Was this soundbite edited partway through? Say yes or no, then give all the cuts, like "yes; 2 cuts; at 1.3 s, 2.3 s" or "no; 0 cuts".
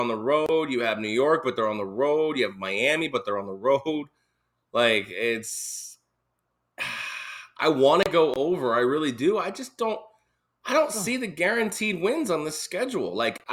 no; 0 cuts